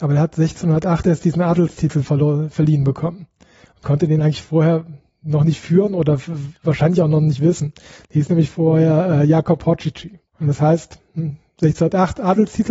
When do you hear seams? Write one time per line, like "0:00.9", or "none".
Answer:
none